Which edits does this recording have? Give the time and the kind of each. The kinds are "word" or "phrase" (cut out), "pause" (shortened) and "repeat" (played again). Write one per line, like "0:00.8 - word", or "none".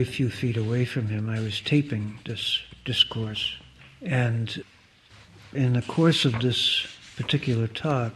none